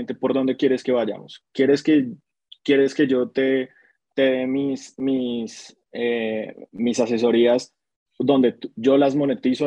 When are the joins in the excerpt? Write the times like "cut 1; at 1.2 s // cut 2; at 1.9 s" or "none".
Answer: none